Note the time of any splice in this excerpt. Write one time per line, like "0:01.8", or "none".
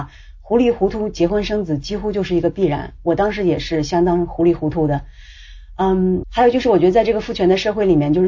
0:06.2